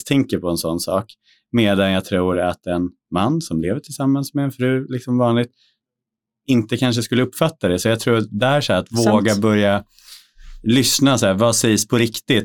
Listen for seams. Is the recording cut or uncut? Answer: uncut